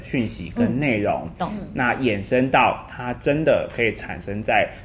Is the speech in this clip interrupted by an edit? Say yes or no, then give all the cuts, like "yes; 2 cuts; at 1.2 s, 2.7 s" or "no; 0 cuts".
no; 0 cuts